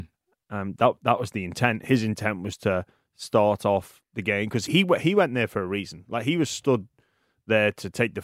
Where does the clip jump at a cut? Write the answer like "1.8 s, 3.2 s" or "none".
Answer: 4.7 s